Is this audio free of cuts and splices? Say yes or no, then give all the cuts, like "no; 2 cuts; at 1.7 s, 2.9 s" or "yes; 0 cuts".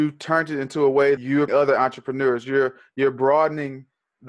no; 2 cuts; at 1.2 s, 1.5 s